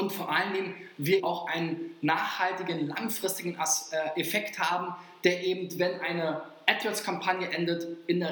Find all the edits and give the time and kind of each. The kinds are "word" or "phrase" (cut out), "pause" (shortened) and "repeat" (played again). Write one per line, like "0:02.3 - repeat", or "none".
0:01.2 - word